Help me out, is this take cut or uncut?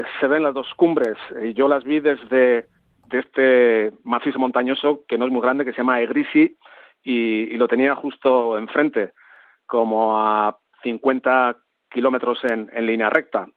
cut